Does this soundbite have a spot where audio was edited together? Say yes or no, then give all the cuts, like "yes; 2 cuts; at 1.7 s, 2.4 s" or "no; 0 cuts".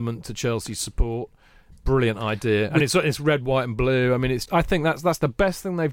yes; 1 cut; at 4.5 s